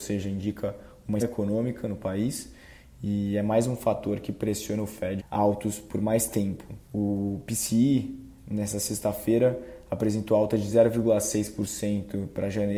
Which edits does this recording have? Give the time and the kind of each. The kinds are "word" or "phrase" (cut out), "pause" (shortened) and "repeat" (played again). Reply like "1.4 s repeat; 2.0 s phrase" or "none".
1.2 s word; 5.2 s phrase; 6.9 s pause